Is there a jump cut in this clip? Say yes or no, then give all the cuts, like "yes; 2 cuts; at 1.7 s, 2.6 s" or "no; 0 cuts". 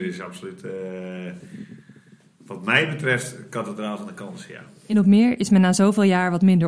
no; 0 cuts